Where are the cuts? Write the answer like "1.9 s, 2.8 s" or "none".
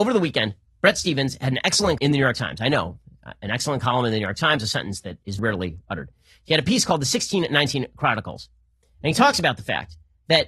2.0 s, 5.4 s